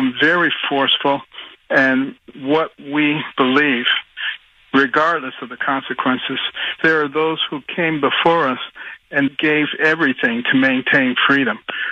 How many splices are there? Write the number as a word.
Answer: three